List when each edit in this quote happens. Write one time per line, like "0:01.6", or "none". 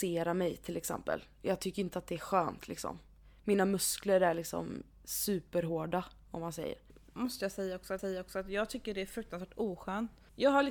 0:08.0